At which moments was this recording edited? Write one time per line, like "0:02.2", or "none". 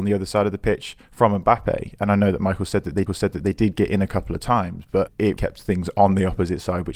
0:03.1
0:05.4